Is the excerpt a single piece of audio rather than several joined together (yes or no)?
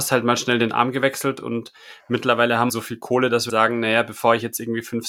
no